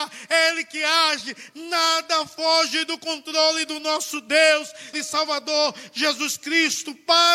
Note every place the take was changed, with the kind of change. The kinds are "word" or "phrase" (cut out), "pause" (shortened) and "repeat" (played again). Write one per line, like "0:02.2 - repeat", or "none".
0:04.9 - word